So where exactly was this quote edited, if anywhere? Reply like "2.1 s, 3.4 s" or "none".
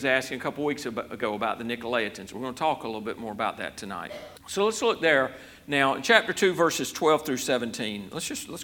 4.4 s

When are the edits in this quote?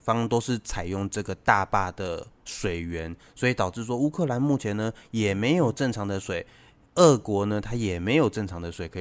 none

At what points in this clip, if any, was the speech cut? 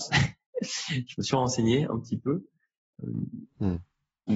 none

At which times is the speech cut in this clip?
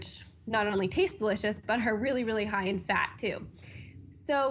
none

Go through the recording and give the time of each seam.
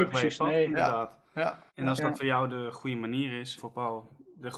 1.7 s, 3.6 s

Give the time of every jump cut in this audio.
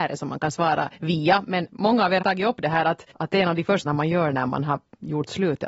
0.9 s, 2.2 s, 3.1 s, 3.8 s

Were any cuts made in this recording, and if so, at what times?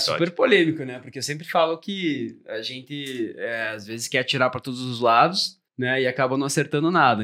5.7 s

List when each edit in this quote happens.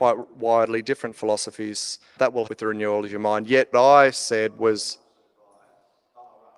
2.2 s, 2.5 s, 3.7 s

